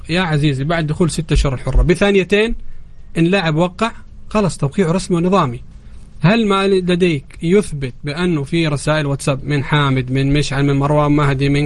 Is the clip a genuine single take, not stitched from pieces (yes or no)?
yes